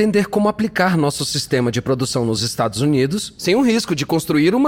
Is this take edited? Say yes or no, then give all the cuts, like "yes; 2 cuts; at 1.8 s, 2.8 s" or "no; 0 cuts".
no; 0 cuts